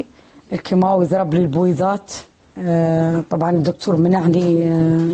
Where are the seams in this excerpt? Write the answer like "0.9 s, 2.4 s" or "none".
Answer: none